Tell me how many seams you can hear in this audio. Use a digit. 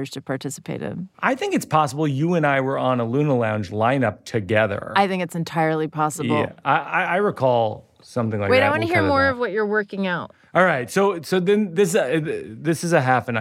1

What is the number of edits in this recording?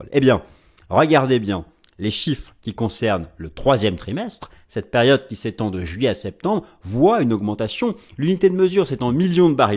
0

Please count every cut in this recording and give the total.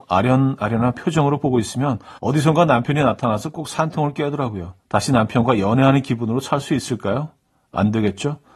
2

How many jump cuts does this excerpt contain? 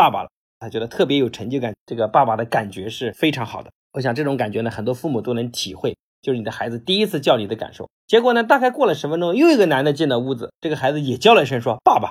1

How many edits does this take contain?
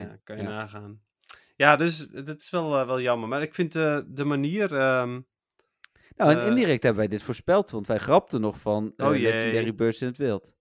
0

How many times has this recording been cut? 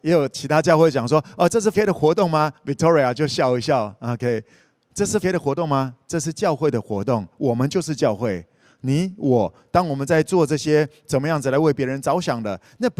2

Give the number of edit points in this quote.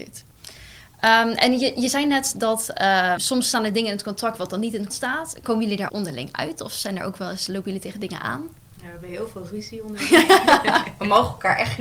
3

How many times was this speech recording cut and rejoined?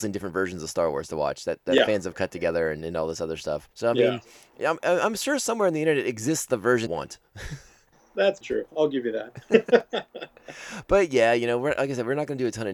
3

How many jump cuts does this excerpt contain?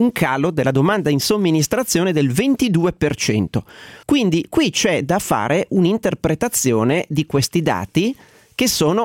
1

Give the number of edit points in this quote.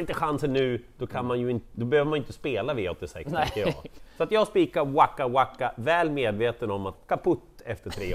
1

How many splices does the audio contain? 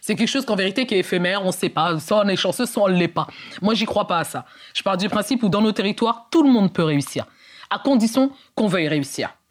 0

